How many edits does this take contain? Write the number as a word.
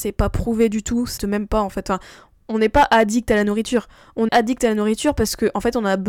two